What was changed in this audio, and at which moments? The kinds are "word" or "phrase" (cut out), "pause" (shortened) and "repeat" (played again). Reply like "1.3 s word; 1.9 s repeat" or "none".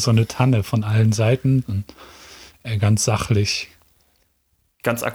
1.6 s word